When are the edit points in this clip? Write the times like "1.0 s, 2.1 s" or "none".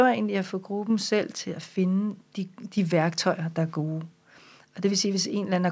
none